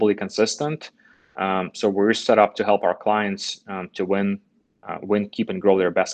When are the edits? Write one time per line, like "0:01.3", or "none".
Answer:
none